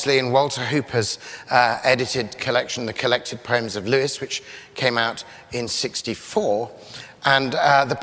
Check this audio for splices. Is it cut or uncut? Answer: uncut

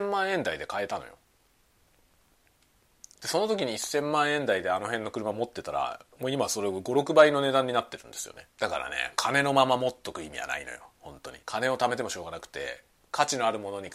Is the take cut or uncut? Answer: cut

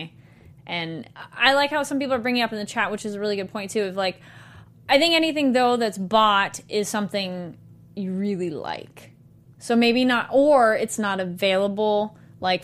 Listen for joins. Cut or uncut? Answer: uncut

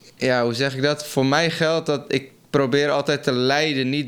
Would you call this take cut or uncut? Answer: uncut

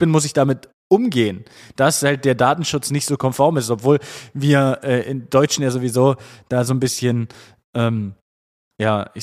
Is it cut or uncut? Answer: uncut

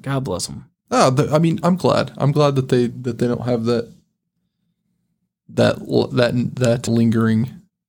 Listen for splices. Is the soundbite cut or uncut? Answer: cut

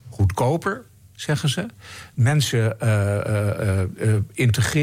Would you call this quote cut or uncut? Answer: uncut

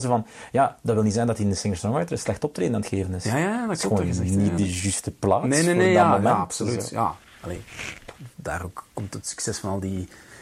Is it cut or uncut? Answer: uncut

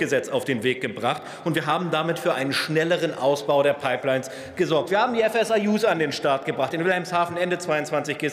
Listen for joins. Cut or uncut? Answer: uncut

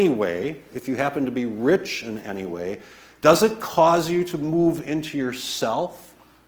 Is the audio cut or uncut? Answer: uncut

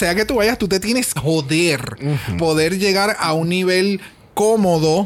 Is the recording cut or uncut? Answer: cut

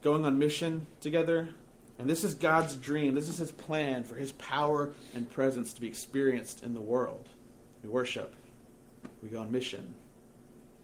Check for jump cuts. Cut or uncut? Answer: cut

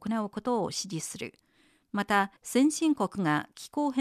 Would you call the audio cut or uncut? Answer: cut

